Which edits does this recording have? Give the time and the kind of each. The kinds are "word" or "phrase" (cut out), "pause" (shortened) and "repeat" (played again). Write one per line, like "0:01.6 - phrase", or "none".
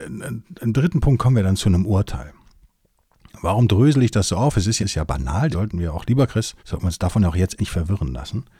0:04.8 - phrase
0:05.5 - word
0:06.6 - pause
0:07.6 - word